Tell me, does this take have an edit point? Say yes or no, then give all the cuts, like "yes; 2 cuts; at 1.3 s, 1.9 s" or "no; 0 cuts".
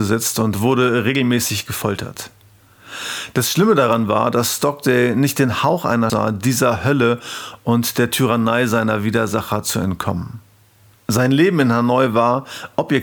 yes; 1 cut; at 6.1 s